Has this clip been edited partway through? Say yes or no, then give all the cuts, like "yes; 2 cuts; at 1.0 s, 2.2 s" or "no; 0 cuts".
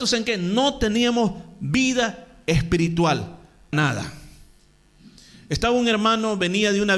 yes; 1 cut; at 3.7 s